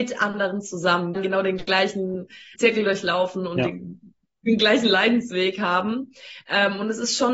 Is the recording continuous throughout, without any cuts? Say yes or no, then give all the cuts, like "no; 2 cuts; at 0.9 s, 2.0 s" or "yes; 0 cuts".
no; 2 cuts; at 1.1 s, 2.5 s